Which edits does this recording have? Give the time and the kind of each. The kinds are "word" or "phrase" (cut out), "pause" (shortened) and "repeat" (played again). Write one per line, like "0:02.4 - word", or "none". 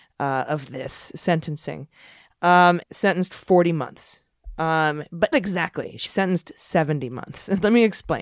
0:02.8 - phrase
0:05.3 - word
0:06.1 - word